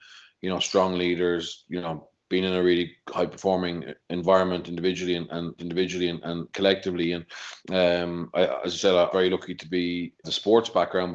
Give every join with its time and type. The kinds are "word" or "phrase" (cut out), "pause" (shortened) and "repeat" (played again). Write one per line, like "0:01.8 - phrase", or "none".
0:05.6 - repeat
0:07.6 - pause
0:09.1 - word
0:10.2 - phrase